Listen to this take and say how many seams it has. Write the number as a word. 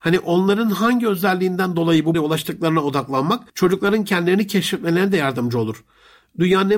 two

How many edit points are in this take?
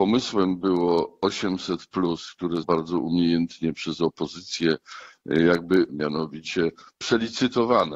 two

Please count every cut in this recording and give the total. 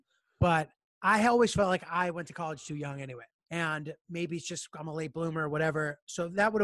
one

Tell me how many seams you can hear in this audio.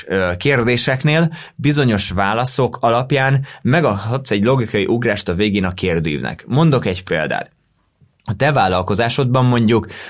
zero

